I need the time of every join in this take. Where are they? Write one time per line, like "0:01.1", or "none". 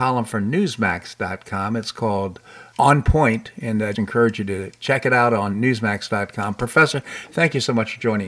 0:02.7
0:03.9